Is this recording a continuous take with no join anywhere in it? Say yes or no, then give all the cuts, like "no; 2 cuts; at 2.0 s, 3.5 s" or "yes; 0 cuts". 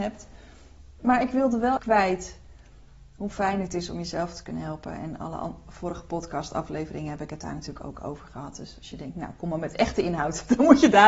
no; 1 cut; at 1.8 s